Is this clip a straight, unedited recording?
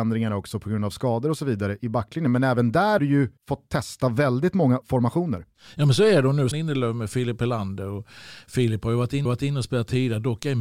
no; 6 cuts; at 1.8 s, 3.0 s, 3.4 s, 4.8 s, 6.5 s, 9.3 s

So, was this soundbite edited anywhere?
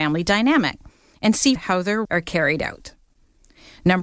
yes; 2 cuts; at 1.5 s, 2.0 s

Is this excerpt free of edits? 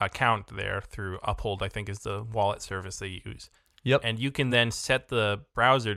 yes; 0 cuts

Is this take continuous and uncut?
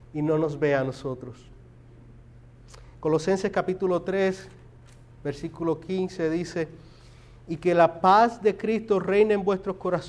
yes; 0 cuts

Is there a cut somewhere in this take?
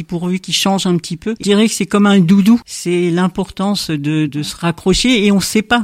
yes; 2 cuts; at 1.4 s, 4.3 s

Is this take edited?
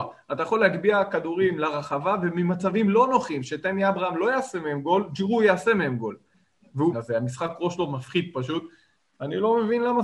yes; 1 cut; at 6.9 s

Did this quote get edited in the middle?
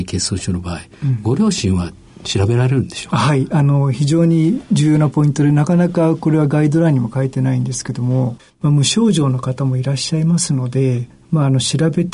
no; 0 cuts

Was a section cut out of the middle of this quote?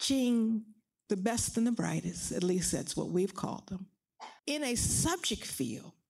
yes; 1 cut; at 4.4 s

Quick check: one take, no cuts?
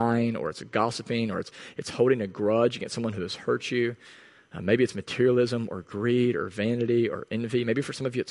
yes; 0 cuts

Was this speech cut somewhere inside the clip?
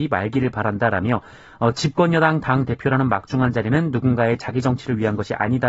no; 0 cuts

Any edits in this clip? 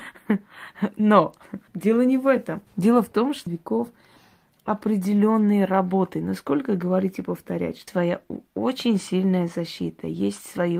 yes; 4 cuts; at 1.7 s, 2.7 s, 3.5 s, 7.9 s

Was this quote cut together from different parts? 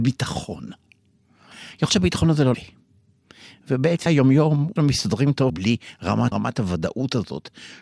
yes; 6 cuts; at 1.9 s, 2.5 s, 4.1 s, 4.8 s, 5.5 s, 6.3 s

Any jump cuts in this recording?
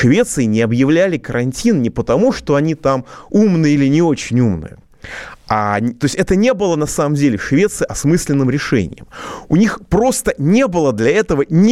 no; 0 cuts

